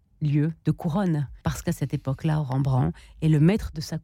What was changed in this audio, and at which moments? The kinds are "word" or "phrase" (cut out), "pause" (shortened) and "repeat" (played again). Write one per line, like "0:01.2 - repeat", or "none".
0:01.4 - pause